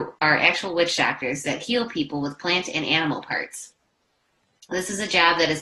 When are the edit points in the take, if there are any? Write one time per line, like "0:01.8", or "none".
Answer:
none